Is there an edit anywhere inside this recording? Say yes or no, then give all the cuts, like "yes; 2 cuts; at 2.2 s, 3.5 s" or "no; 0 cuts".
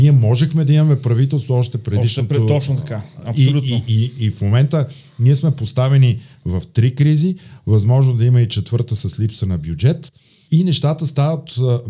no; 0 cuts